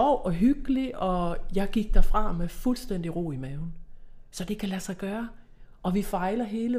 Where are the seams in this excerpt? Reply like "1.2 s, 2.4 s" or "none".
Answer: none